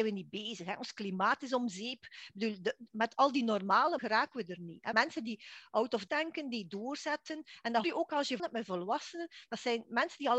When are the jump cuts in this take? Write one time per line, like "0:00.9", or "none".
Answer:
0:02.9
0:04.0
0:04.9
0:06.1
0:07.8
0:08.4